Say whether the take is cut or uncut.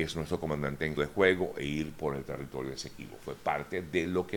cut